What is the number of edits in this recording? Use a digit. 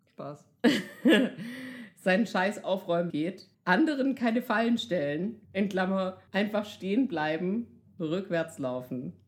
4